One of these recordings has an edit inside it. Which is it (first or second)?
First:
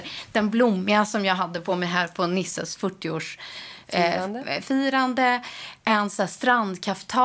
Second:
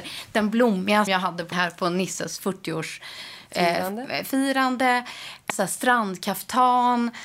second